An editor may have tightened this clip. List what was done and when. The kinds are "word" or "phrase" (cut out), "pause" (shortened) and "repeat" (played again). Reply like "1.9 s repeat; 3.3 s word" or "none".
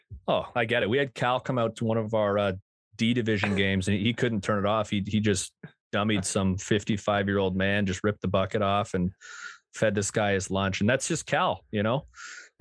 none